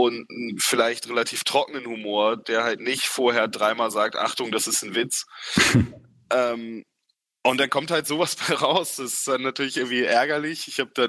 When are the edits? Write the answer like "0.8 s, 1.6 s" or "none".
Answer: none